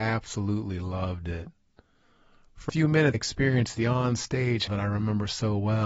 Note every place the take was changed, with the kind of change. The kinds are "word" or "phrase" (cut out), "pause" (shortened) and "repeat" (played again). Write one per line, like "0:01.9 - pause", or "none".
0:02.7 - word
0:03.1 - word
0:04.7 - word